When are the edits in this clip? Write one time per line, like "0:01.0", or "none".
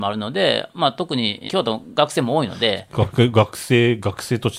0:01.5